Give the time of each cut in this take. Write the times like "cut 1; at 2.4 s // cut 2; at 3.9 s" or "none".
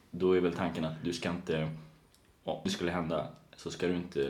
cut 1; at 2.7 s